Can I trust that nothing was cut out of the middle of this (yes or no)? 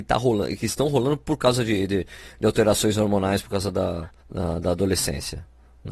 no